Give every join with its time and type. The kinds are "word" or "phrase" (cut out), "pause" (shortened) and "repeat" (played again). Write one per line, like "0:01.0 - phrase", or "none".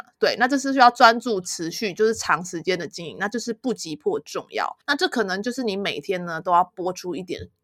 0:04.8 - pause